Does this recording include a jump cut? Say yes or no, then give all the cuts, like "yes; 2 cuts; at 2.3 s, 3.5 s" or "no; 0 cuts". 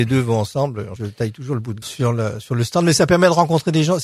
yes; 2 cuts; at 1.0 s, 1.8 s